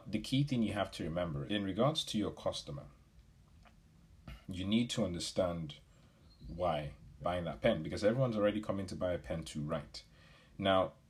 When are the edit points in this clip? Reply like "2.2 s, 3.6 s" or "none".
1.5 s, 4.4 s, 7.2 s